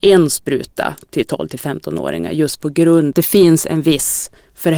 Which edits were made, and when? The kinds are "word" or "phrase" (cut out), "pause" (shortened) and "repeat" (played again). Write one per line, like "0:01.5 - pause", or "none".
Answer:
0:03.1 - phrase